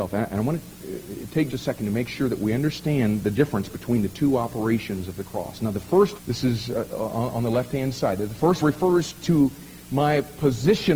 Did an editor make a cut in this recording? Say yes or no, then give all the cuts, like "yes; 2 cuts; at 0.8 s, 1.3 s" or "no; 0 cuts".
yes; 3 cuts; at 1.5 s, 6.2 s, 8.6 s